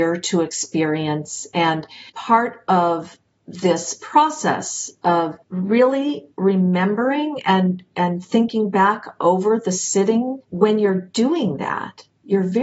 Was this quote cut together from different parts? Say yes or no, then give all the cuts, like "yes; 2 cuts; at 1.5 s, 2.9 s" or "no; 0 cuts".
yes; 3 cuts; at 2.1 s, 5.4 s, 10.4 s